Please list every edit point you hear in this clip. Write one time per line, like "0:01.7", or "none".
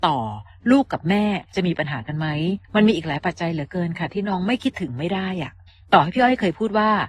0:02.6
0:05.7